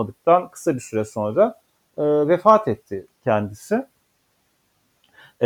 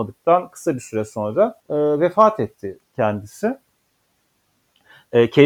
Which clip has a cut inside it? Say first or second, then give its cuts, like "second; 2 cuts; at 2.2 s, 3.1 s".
second; 1 cut; at 1.6 s